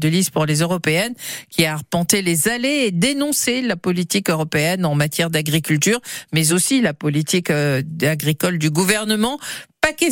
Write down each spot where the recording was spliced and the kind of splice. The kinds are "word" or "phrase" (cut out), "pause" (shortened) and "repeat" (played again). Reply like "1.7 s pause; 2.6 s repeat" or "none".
none

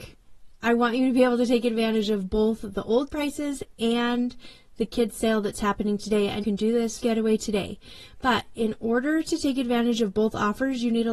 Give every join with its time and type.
3.1 s word; 6.4 s word; 7.0 s word

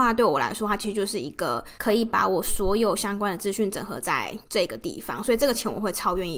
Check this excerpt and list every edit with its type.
1.8 s pause; 4.4 s pause

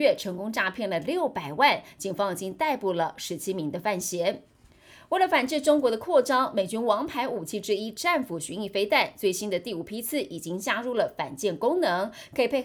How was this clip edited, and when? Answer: none

